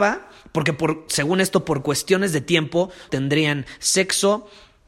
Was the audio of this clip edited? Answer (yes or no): yes